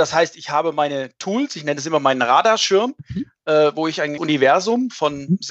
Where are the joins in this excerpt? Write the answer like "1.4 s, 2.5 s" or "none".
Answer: 4.2 s